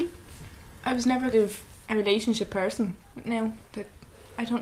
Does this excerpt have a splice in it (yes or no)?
yes